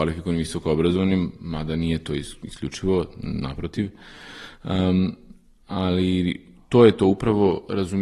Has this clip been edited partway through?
no; 0 cuts

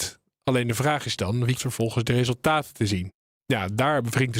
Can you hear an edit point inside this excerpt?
yes; 1 cut; at 1.6 s

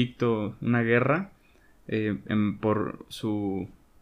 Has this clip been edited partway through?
no; 0 cuts

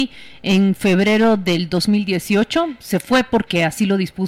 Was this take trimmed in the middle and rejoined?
no; 0 cuts

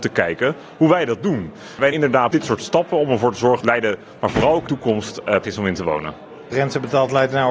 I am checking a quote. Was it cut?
yes; 7 cuts; at 1.9 s, 2.3 s, 3.6 s, 4.2 s, 4.7 s, 5.4 s, 6.5 s

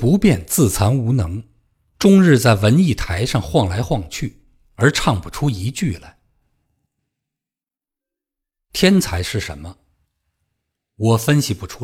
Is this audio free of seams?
yes; 0 cuts

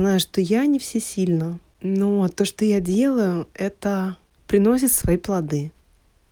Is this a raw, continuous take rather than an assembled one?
yes; 0 cuts

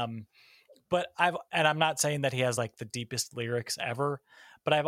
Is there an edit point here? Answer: no; 0 cuts

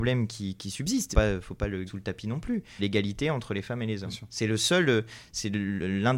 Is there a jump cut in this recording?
yes; 3 cuts; at 1.1 s, 1.9 s, 2.8 s

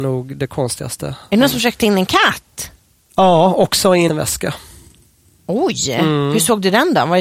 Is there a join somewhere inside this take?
yes; 1 cut; at 4.1 s

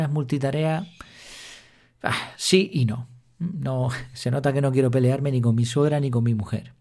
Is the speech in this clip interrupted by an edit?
no; 0 cuts

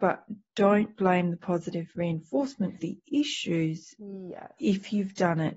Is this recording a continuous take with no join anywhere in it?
no; 1 cut; at 2.8 s

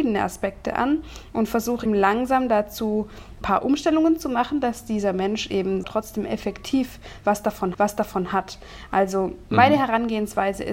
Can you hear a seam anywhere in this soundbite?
yes; 4 cuts; at 1.9 s, 3.4 s, 5.8 s, 7.7 s

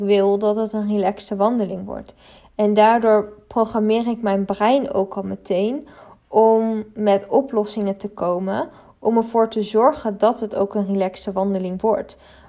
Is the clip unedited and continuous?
yes; 0 cuts

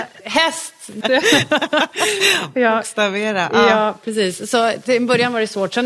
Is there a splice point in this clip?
yes; 1 cut; at 1.0 s

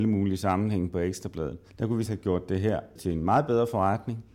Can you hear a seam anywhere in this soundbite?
yes; 3 cuts; at 1.7 s, 2.1 s, 3.0 s

